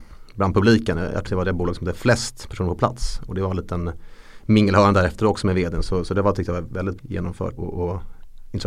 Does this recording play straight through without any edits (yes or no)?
no